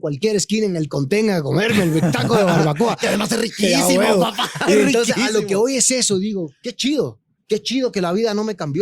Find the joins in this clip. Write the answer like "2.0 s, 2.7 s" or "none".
7.4 s

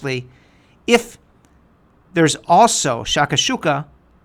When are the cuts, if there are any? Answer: none

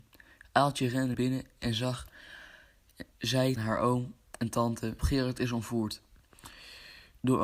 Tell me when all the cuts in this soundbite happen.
1.1 s, 3.1 s, 3.6 s, 5.0 s

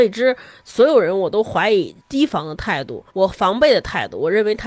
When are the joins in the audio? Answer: 2.0 s, 3.1 s

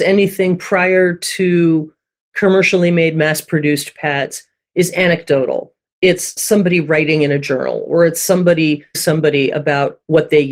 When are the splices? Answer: 8.9 s

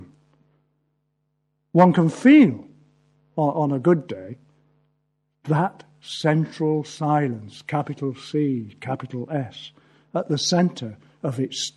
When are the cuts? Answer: none

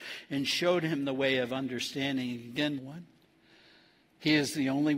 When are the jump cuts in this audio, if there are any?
2.8 s

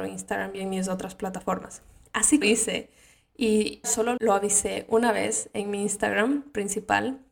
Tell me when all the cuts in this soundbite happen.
2.4 s, 3.8 s, 4.2 s

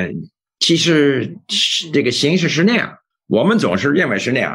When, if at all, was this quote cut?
3.1 s

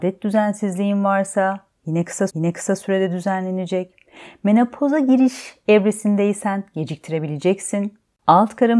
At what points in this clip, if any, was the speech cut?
2.3 s

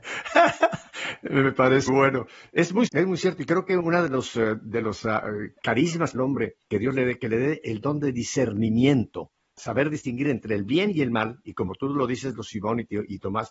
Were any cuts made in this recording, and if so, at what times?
1.9 s, 2.9 s, 5.6 s, 6.1 s, 6.6 s, 9.6 s

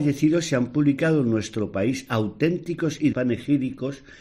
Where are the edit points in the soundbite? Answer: 3.1 s

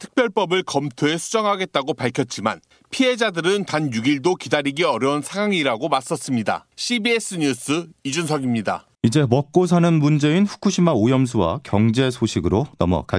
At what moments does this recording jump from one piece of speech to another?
2.7 s, 6.7 s, 8.9 s

